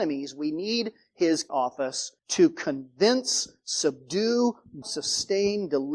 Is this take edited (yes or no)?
yes